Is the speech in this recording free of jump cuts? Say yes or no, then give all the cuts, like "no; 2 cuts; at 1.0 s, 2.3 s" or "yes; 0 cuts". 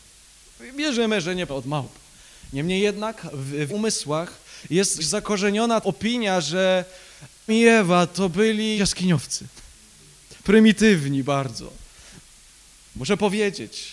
no; 6 cuts; at 1.5 s, 3.7 s, 5.0 s, 5.8 s, 7.5 s, 8.8 s